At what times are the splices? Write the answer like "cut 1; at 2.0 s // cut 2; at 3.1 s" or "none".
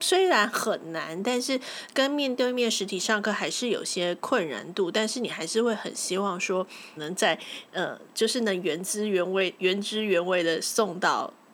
cut 1; at 7.0 s

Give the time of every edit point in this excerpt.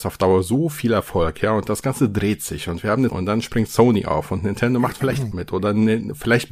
cut 1; at 3.1 s // cut 2; at 5.3 s

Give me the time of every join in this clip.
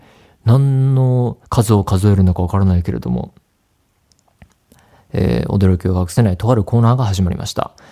cut 1; at 1.4 s

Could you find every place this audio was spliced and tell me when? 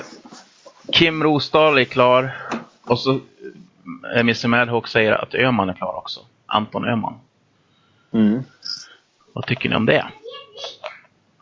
none

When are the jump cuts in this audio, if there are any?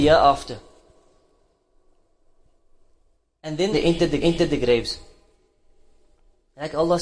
cut 1; at 3.7 s // cut 2; at 4.2 s

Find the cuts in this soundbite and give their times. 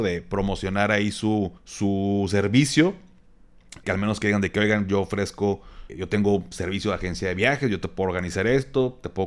cut 1; at 1.6 s // cut 2; at 3.8 s // cut 3; at 5.9 s

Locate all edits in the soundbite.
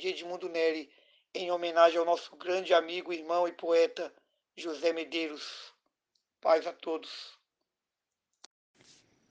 none

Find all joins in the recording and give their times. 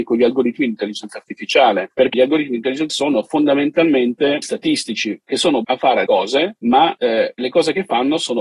cut 1; at 2.1 s // cut 2; at 2.9 s // cut 3; at 4.4 s // cut 4; at 5.6 s // cut 5; at 6.1 s

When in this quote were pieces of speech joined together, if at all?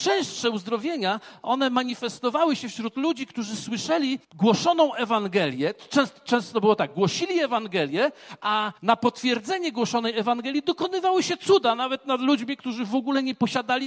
cut 1; at 4.2 s // cut 2; at 8.8 s

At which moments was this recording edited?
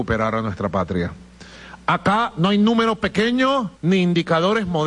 cut 1; at 3.7 s

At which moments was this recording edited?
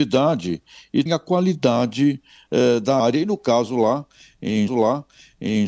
cut 1; at 1.1 s // cut 2; at 3.0 s // cut 3; at 4.7 s

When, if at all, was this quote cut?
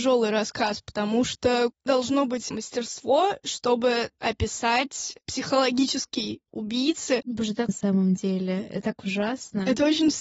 cut 1; at 1.9 s // cut 2; at 2.5 s // cut 3; at 4.2 s // cut 4; at 6.5 s // cut 5; at 7.7 s

